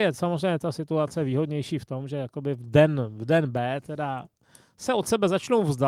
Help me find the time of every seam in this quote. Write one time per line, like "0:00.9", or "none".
none